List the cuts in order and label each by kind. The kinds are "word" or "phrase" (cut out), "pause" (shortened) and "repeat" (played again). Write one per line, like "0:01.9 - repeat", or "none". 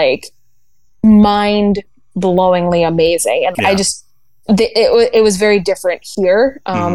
0:03.5 - word